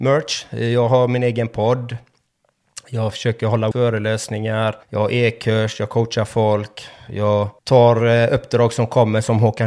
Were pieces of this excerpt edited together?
yes; 3 cuts; at 3.7 s, 4.8 s, 7.6 s

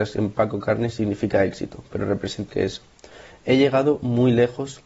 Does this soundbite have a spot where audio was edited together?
yes; 1 cut; at 2.5 s

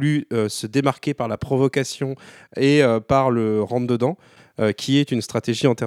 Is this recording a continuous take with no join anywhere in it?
yes; 0 cuts

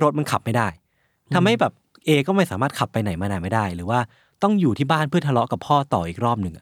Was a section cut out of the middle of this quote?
no; 0 cuts

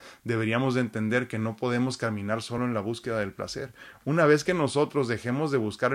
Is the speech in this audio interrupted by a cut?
no; 0 cuts

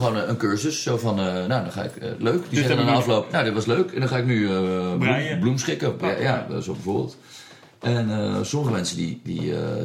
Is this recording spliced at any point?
no; 0 cuts

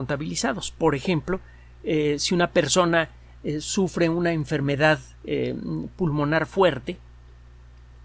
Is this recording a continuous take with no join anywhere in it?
no; 1 cut; at 5.1 s

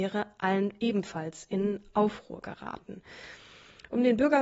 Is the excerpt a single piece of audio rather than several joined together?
yes; 0 cuts

